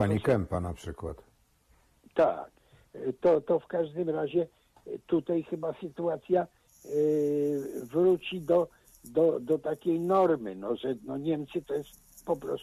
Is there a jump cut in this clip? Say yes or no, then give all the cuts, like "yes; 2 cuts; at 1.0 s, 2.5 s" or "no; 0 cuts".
no; 0 cuts